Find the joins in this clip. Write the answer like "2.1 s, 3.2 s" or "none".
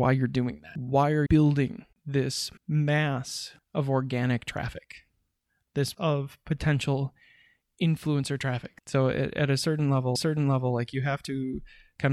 1.3 s, 2.6 s, 5.9 s, 10.2 s

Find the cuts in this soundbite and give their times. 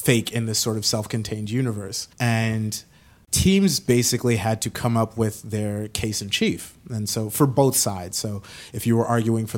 2.1 s

